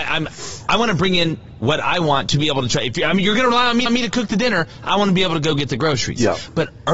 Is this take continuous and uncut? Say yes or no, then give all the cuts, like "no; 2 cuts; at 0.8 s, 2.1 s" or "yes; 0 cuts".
no; 1 cut; at 3.9 s